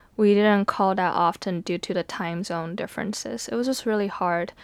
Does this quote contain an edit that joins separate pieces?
no; 0 cuts

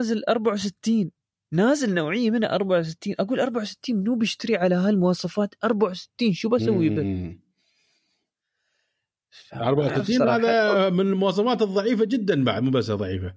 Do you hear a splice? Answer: no; 0 cuts

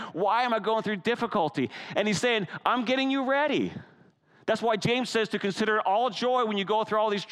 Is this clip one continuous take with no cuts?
yes; 0 cuts

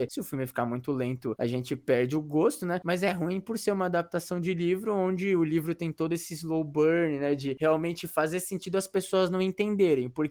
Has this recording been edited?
no; 0 cuts

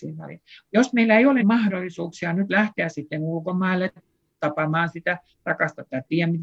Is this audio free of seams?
no; 1 cut; at 1.4 s

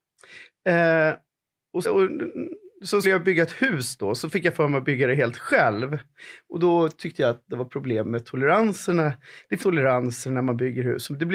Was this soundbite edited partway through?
yes; 3 cuts; at 1.8 s, 3.0 s, 9.6 s

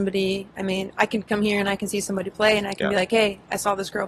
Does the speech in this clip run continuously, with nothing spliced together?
yes; 0 cuts

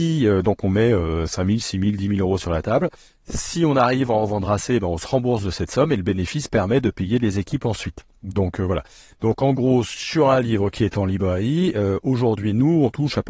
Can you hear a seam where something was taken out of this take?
no; 0 cuts

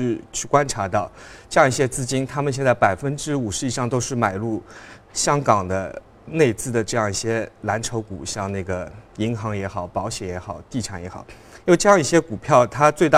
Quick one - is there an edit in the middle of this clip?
no; 0 cuts

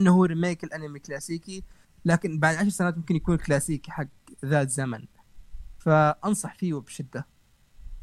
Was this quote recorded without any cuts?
yes; 0 cuts

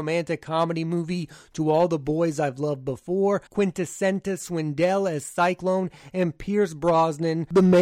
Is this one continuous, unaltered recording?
no; 1 cut; at 3.5 s

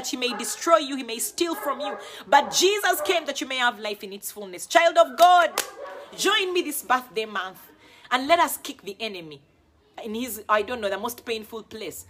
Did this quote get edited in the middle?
no; 0 cuts

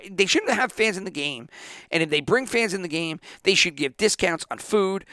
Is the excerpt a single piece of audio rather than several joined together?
yes; 0 cuts

